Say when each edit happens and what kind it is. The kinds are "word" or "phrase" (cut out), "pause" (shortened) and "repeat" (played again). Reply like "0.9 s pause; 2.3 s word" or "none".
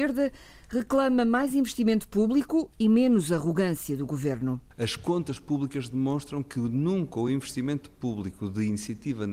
none